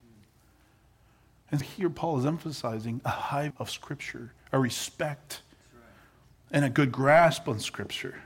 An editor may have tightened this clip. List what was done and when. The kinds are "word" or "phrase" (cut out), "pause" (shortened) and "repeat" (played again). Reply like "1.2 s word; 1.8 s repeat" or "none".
1.6 s word; 3.5 s word